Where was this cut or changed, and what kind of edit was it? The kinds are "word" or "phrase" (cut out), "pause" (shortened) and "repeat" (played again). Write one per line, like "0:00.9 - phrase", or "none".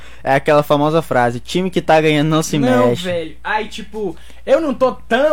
none